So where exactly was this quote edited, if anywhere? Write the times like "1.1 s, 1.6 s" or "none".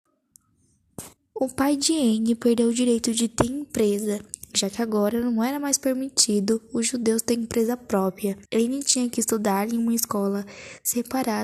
1.2 s, 8.5 s